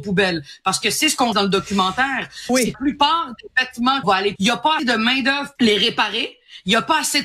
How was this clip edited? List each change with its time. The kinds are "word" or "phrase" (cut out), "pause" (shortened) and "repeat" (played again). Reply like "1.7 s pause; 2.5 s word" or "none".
1.3 s word; 2.7 s word; 4.0 s word; 4.4 s word; 4.8 s word; 5.6 s word

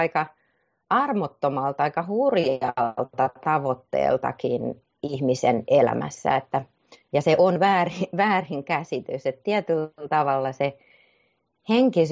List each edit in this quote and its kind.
4.9 s pause

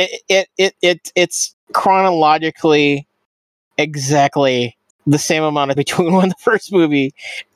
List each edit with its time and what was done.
1.6 s pause; 4.9 s pause; 5.8 s word

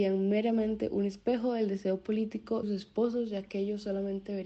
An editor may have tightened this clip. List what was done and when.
2.6 s word

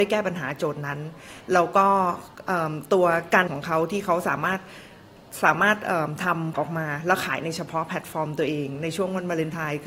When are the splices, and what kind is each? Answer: 3.5 s word; 6.5 s word

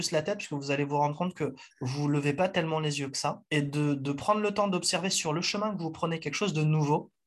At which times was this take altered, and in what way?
3.5 s pause

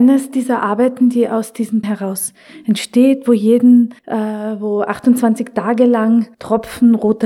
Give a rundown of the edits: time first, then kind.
1.8 s word; 4.0 s pause; 6.3 s pause

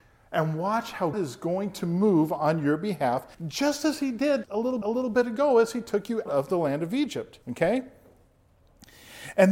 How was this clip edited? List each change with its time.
1.1 s word; 3.3 s pause; 4.4 s word; 4.8 s repeat; 6.3 s word; 7.4 s pause

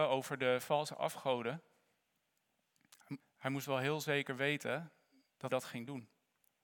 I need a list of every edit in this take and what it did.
3.2 s word; 5.5 s word

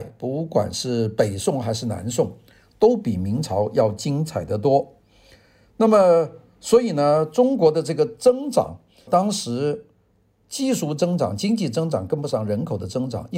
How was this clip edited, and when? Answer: 9.1 s word

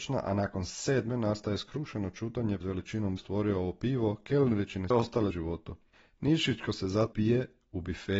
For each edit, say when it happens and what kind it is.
2.6 s word; 3.2 s phrase; 4.9 s phrase; 5.3 s phrase; 5.9 s pause; 7.1 s word

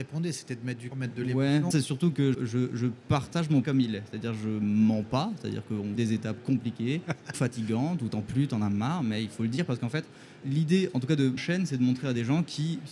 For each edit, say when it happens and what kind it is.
0.9 s word; 1.7 s word; 2.3 s word; 3.6 s word; 6.0 s word; 7.3 s word; 8.2 s word; 10.4 s word; 11.4 s word

